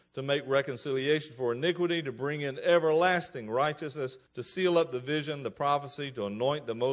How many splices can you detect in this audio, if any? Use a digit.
1